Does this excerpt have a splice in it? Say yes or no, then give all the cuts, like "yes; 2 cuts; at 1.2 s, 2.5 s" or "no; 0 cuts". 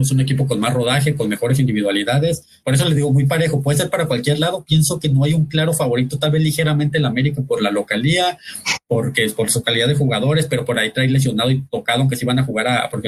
no; 0 cuts